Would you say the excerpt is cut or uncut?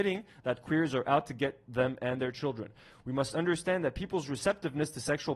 uncut